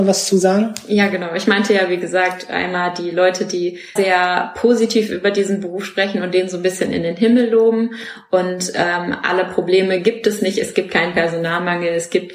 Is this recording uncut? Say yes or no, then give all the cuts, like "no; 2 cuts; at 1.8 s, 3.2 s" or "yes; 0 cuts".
no; 1 cut; at 4.0 s